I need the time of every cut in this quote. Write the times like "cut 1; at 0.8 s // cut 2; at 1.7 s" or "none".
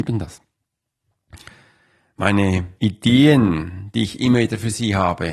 cut 1; at 2.8 s